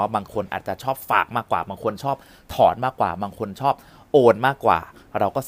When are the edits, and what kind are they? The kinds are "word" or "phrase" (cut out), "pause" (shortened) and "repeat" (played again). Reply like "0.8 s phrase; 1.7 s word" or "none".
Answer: none